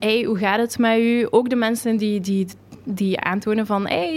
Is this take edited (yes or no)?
no